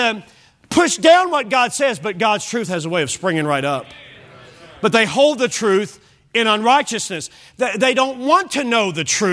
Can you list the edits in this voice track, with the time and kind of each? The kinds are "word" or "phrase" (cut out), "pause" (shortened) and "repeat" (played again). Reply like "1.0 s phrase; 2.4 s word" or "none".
none